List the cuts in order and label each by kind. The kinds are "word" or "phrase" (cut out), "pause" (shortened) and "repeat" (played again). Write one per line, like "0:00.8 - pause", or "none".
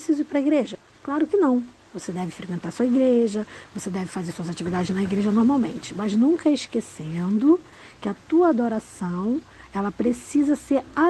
none